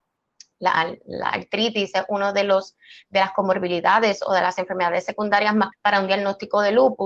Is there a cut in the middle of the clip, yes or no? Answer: yes